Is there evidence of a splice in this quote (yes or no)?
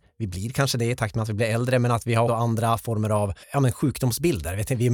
yes